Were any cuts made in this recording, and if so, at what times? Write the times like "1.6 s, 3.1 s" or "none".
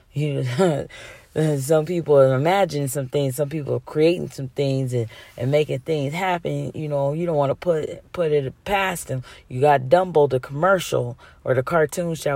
none